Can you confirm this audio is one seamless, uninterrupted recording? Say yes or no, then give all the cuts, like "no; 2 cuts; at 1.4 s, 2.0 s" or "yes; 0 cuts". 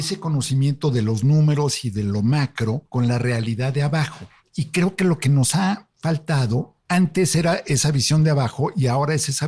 yes; 0 cuts